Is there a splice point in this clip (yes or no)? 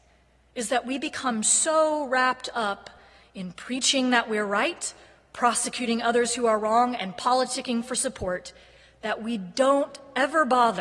no